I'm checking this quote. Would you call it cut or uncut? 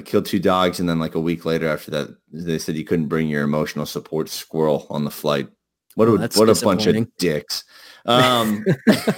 uncut